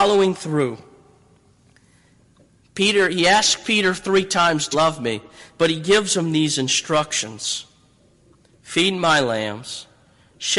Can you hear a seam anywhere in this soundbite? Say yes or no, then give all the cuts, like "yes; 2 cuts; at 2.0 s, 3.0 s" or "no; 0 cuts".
yes; 1 cut; at 4.7 s